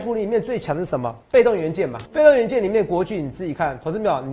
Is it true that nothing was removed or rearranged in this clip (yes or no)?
no